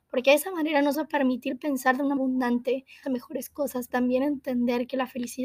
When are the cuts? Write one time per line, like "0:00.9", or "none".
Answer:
0:00.9
0:02.2
0:03.0
0:03.9